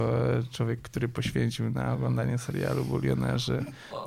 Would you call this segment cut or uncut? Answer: uncut